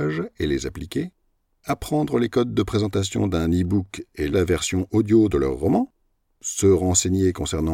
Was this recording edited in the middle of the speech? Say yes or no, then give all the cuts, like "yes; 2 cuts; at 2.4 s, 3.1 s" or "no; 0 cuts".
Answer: yes; 1 cut; at 4.3 s